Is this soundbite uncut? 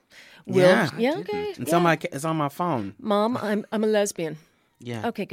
yes; 0 cuts

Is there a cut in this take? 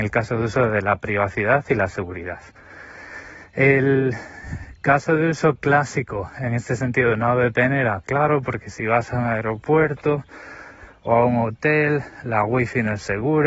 no; 0 cuts

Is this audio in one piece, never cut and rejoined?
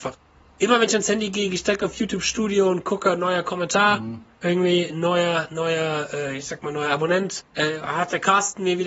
no; 1 cut; at 7.5 s

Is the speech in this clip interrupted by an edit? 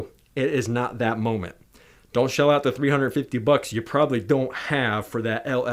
no; 0 cuts

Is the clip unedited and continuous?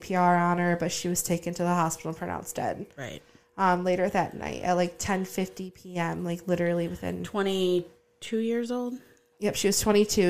yes; 0 cuts

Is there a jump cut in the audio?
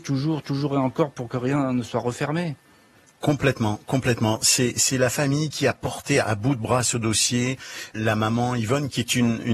no; 0 cuts

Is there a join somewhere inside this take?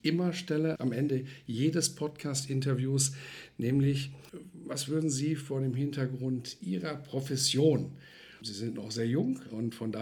no; 0 cuts

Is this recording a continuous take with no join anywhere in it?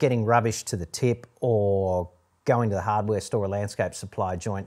yes; 0 cuts

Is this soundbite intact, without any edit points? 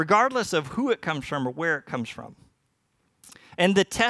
yes; 0 cuts

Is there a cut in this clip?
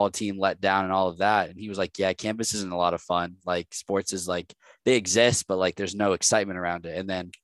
no; 0 cuts

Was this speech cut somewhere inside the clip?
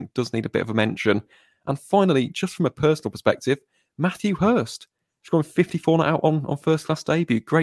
no; 0 cuts

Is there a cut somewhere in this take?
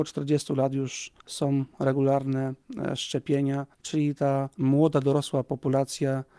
yes; 3 cuts; at 1.2 s, 3.7 s, 4.5 s

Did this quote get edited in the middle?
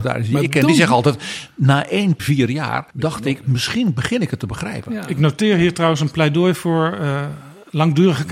yes; 2 cuts; at 2.2 s, 2.9 s

